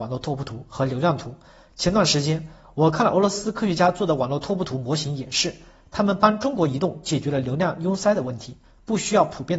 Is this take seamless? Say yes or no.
yes